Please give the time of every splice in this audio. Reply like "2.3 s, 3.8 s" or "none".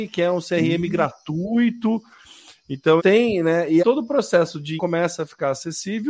3.0 s, 3.8 s, 4.8 s